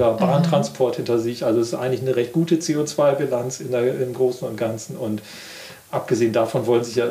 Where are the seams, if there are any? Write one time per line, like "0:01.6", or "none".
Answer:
none